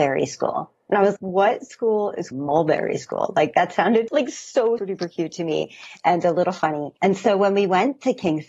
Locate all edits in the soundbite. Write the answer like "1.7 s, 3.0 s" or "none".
1.2 s, 2.3 s, 4.1 s, 4.8 s, 7.0 s

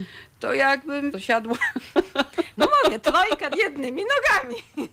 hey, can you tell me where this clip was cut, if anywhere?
1.1 s, 3.5 s

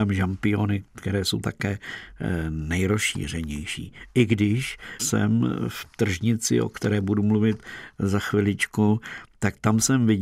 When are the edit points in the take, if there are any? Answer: 1.4 s, 5.0 s

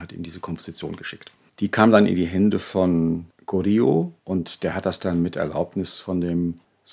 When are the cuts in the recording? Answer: 1.5 s, 4.2 s

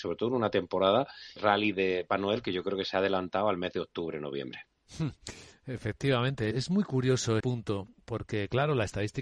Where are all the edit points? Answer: 1.4 s, 2.1 s, 6.5 s, 7.4 s

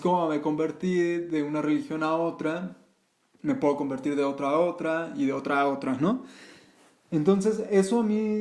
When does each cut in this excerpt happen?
none

